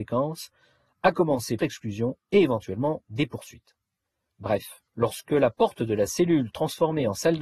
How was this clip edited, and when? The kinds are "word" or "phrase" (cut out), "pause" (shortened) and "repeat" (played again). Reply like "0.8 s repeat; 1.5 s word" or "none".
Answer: 1.6 s phrase; 4.9 s pause